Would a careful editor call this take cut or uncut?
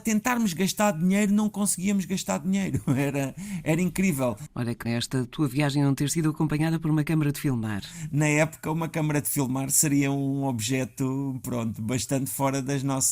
cut